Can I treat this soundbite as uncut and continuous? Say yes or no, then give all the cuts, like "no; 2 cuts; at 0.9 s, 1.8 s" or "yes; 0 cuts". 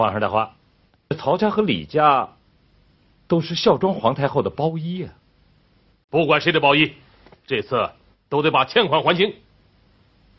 yes; 0 cuts